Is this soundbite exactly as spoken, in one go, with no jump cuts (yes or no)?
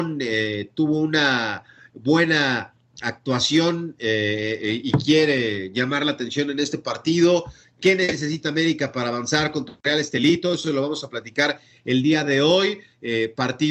yes